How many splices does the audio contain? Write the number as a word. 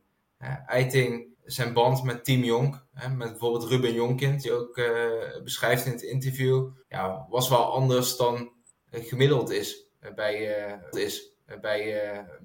four